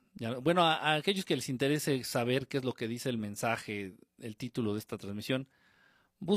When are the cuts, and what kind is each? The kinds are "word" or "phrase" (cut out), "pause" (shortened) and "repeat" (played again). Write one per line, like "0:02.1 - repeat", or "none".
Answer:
none